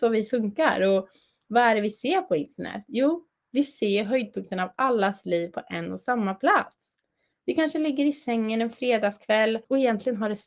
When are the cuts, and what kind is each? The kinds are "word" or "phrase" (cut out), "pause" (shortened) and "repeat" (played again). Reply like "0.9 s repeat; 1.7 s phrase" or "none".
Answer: none